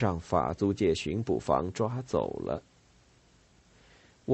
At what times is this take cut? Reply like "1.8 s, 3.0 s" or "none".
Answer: none